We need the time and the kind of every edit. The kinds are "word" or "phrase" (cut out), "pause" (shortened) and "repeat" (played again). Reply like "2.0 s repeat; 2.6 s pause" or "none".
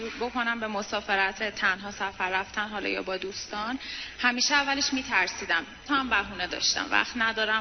1.4 s word; 5.9 s word